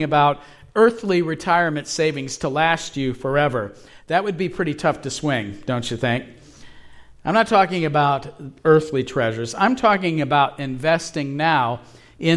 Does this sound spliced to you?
no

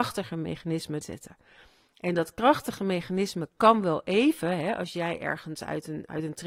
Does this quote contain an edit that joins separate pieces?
yes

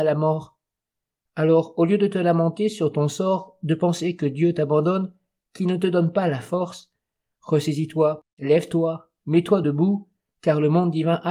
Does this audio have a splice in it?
no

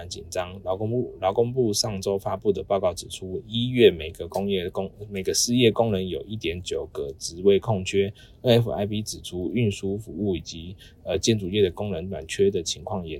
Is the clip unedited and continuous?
yes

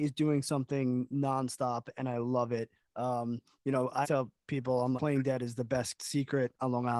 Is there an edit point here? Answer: yes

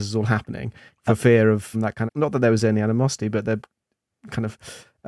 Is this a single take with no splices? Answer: no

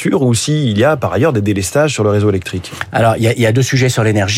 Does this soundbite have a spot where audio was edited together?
no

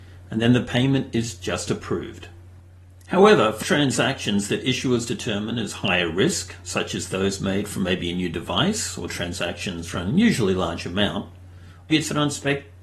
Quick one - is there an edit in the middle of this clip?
yes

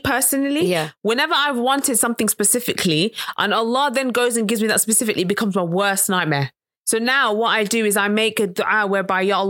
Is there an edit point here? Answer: no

